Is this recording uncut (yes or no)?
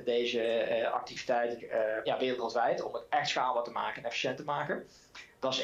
no